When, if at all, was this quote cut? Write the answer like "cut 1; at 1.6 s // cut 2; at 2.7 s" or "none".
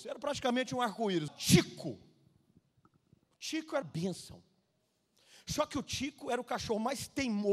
cut 1; at 1.3 s // cut 2; at 3.8 s